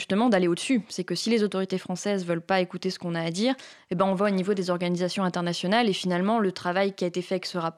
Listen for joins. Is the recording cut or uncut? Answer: uncut